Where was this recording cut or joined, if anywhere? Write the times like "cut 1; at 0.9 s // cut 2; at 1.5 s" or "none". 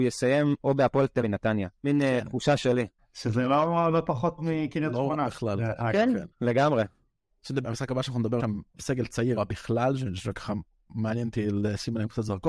cut 1; at 1.2 s // cut 2; at 1.8 s // cut 3; at 3.0 s // cut 4; at 4.4 s // cut 5; at 6.3 s // cut 6; at 7.6 s // cut 7; at 8.4 s // cut 8; at 9.4 s